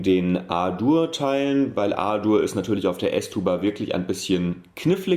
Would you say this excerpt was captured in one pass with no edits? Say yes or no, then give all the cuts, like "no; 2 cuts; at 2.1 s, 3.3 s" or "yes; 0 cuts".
yes; 0 cuts